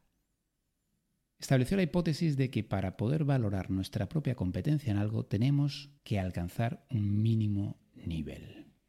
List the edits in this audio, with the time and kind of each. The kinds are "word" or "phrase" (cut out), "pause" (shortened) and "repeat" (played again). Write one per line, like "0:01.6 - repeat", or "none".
0:06.0 - pause